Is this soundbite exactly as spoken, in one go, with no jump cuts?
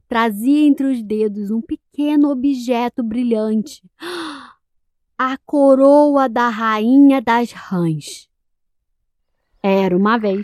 yes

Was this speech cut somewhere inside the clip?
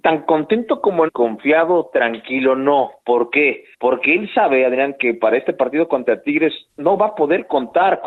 yes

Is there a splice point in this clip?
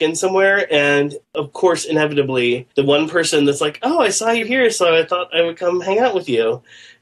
yes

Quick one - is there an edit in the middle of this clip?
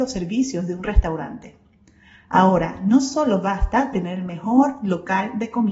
no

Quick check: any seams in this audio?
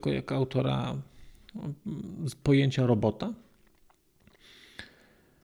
no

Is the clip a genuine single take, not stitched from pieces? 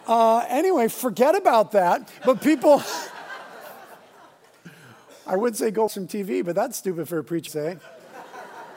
no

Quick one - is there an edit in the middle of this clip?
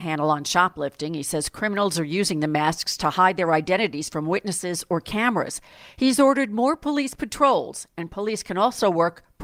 no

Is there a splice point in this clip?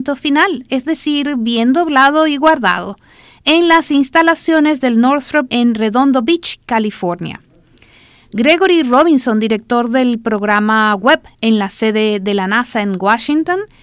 yes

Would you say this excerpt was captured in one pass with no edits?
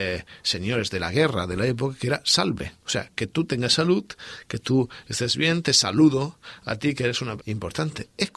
no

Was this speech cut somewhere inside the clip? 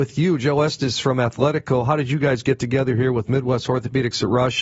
no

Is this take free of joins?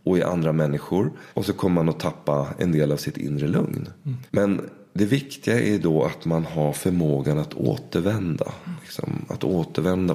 no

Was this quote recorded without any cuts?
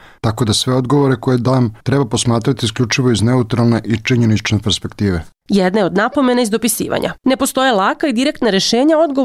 no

